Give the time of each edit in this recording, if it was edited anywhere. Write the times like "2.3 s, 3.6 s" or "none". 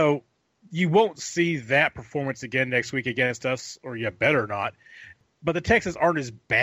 none